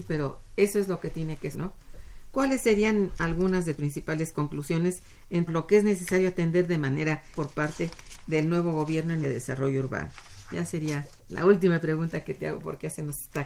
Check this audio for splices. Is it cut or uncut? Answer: cut